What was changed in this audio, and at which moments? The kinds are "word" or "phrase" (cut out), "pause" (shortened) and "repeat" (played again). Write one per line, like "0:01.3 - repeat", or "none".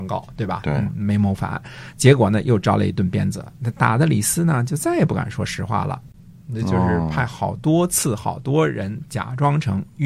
none